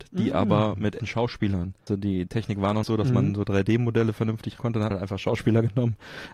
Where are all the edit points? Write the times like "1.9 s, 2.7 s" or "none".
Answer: 1.0 s, 1.9 s, 2.3 s, 2.8 s, 4.6 s, 4.9 s